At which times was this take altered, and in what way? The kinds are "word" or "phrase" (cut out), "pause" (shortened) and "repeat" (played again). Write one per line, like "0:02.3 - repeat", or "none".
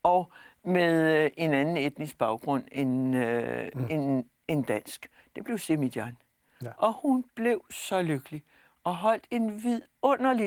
none